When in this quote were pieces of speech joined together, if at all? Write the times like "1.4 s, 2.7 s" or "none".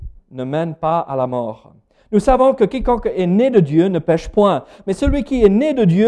none